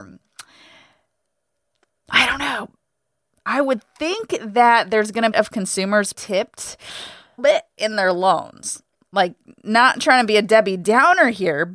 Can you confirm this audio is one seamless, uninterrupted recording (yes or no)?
no